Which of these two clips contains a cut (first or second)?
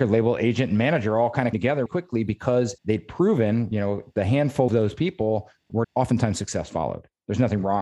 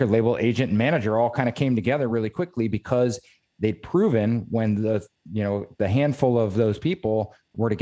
first